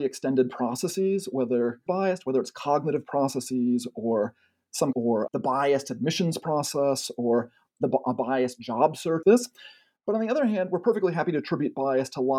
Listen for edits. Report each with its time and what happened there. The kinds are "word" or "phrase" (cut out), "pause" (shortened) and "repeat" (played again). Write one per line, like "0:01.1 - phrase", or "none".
0:01.9 - phrase
0:04.9 - phrase
0:05.3 - word
0:09.2 - phrase